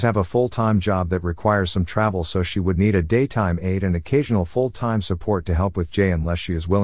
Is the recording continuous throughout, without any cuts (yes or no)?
yes